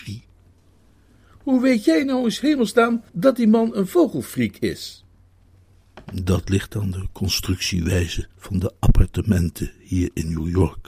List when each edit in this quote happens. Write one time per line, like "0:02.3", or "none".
0:03.1
0:08.3